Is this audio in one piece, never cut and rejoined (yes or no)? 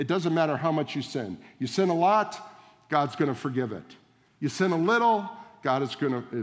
yes